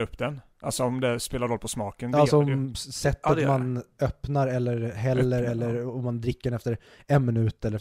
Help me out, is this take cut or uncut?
uncut